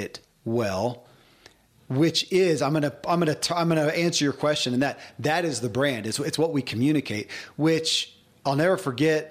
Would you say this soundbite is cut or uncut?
uncut